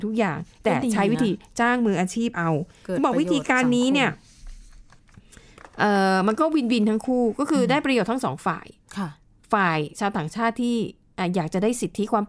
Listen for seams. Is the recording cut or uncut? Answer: uncut